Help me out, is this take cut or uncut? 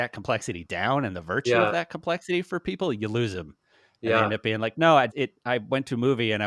cut